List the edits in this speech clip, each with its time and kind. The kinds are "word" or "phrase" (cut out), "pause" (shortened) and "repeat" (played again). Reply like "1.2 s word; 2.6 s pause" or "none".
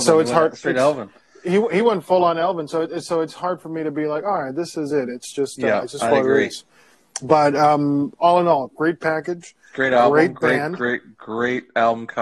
none